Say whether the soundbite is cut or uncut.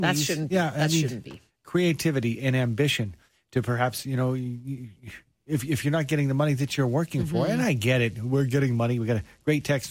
uncut